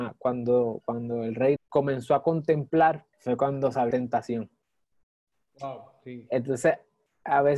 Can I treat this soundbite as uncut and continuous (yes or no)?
no